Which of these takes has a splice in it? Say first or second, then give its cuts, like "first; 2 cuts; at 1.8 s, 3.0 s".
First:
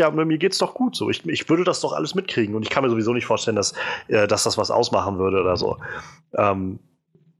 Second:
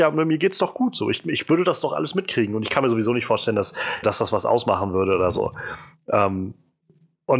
second; 1 cut; at 4.0 s